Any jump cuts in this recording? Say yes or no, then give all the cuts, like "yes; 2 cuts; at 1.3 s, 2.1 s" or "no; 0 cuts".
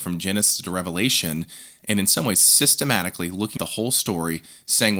yes; 1 cut; at 3.6 s